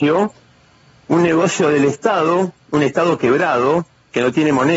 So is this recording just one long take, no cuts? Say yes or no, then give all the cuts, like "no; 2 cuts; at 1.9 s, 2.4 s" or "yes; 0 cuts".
yes; 0 cuts